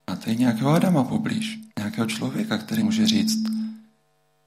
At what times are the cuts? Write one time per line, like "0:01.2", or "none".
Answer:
0:01.7
0:02.8